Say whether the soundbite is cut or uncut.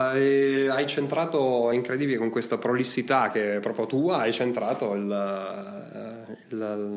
uncut